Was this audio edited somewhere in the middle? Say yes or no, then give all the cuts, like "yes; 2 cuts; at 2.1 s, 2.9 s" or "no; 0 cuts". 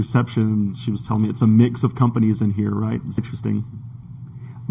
yes; 1 cut; at 3.2 s